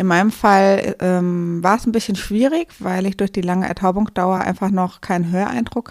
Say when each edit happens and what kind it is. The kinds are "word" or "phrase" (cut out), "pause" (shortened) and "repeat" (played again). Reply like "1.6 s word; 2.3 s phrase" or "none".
none